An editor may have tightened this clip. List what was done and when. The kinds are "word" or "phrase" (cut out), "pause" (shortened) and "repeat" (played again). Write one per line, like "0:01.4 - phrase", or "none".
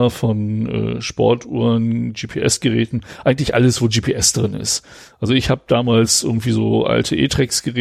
none